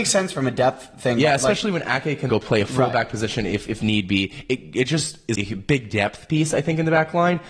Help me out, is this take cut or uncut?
cut